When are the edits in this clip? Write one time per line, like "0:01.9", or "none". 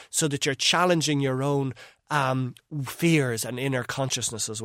none

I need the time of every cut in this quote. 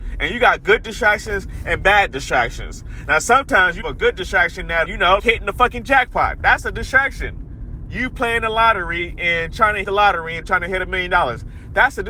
0:03.8
0:04.8
0:05.2
0:09.8

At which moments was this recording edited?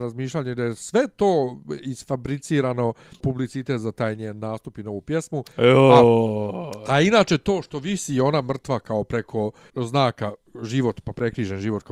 0:03.2
0:09.7

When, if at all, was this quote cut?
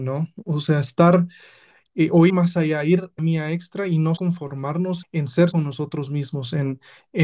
0:02.3
0:03.2
0:04.2
0:05.0
0:05.5

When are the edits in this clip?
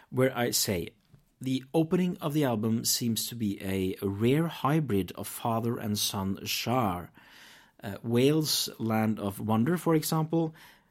none

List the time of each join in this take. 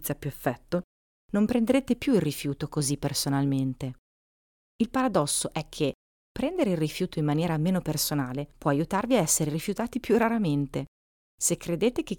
0:08.5

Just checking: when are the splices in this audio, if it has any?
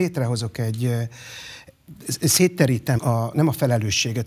0:03.0

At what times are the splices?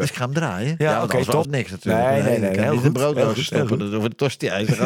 0:01.4

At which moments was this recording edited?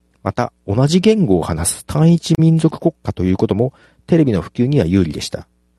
none

